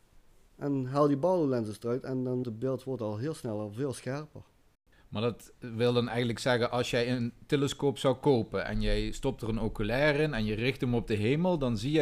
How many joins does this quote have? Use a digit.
1